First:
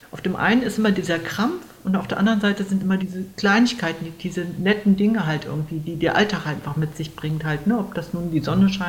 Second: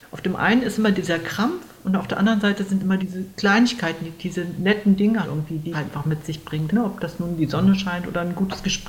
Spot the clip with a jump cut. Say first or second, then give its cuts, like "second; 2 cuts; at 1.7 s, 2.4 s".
second; 3 cuts; at 5.2 s, 5.7 s, 6.7 s